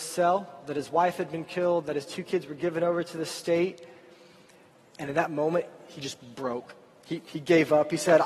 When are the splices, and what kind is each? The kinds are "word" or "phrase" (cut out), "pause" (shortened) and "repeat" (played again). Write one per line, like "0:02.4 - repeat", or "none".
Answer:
none